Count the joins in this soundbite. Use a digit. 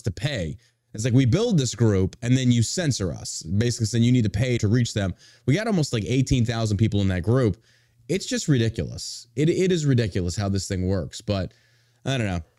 1